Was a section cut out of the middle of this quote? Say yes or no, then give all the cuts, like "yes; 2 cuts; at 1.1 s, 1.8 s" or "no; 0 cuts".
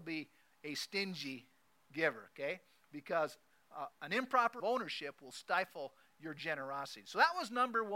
yes; 2 cuts; at 3.9 s, 4.6 s